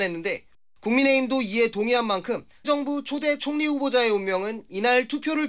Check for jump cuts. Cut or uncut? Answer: cut